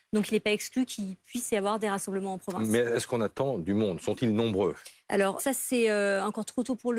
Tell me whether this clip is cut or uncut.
cut